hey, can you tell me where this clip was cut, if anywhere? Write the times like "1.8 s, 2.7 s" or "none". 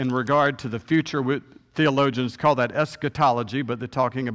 none